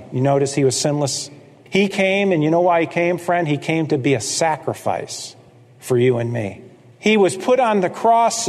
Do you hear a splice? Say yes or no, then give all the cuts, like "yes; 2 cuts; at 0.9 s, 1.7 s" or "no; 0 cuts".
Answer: no; 0 cuts